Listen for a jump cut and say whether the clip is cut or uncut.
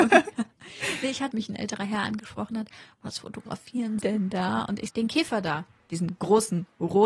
cut